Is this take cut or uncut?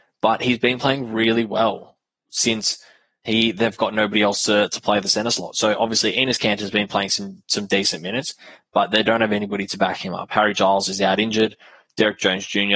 uncut